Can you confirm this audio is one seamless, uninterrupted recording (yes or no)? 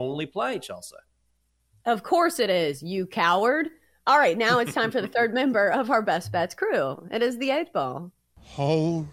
yes